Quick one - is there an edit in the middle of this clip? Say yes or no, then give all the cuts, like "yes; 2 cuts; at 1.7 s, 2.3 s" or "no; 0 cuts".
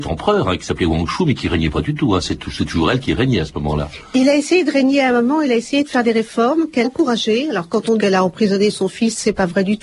yes; 2 cuts; at 6.8 s, 8.0 s